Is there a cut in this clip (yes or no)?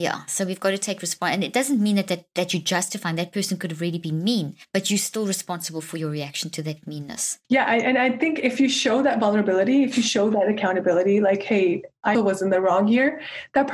yes